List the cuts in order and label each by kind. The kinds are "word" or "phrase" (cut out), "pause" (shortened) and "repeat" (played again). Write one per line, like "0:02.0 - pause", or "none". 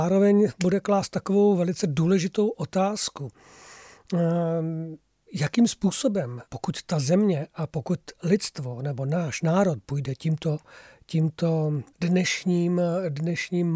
0:06.5 - pause
0:11.9 - pause